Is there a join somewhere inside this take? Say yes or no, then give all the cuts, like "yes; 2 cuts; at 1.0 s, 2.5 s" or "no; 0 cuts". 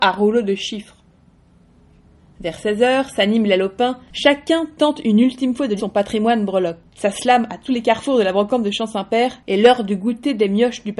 yes; 2 cuts; at 5.8 s, 6.9 s